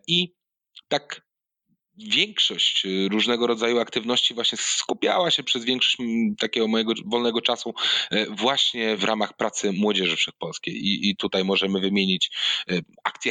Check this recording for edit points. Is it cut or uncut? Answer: cut